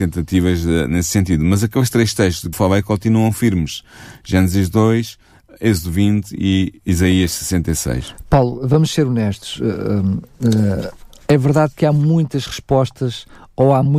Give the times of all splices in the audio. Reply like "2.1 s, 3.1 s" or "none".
2.5 s